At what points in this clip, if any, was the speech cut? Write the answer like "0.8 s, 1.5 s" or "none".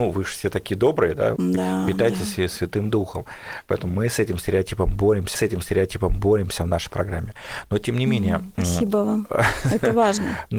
1.4 s, 5.3 s